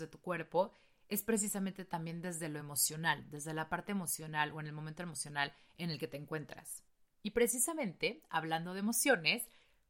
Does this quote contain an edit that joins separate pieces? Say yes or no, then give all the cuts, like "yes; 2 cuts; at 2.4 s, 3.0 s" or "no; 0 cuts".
no; 0 cuts